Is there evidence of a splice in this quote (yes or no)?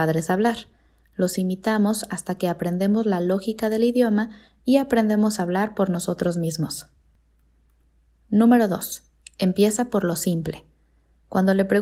no